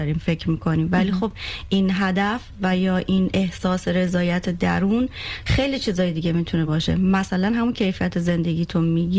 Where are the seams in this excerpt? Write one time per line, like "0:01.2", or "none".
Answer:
none